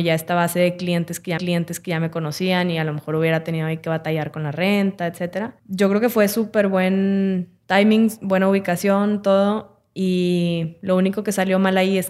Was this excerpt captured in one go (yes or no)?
no